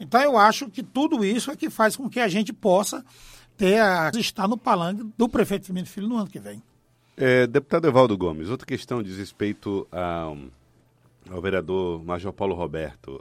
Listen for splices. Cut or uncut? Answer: cut